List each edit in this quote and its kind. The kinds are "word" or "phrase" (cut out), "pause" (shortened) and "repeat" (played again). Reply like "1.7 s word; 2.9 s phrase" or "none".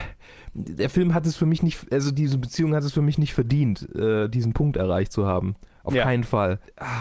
none